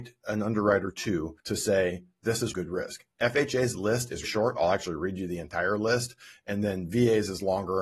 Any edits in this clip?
yes; 3 cuts; at 1.4 s, 2.5 s, 4.2 s

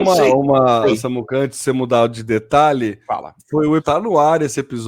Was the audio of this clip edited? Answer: yes; 1 cut; at 3.8 s

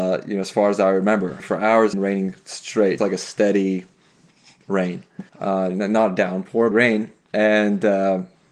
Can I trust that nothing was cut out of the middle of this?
no; 5 cuts; at 1.4 s, 1.9 s, 3.0 s, 5.3 s, 6.7 s

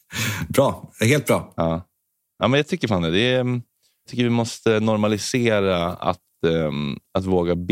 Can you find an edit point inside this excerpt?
yes; 1 cut; at 4.1 s

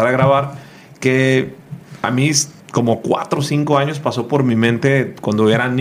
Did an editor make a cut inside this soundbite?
yes; 1 cut; at 2.6 s

